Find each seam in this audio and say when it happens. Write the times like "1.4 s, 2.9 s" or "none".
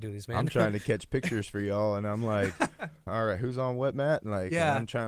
3.1 s